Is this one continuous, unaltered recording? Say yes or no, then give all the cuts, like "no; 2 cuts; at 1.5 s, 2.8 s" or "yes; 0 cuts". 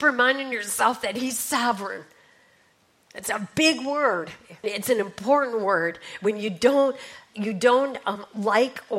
no; 1 cut; at 4.6 s